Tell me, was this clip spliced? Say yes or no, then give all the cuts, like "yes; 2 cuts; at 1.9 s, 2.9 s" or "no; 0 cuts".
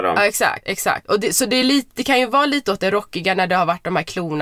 no; 0 cuts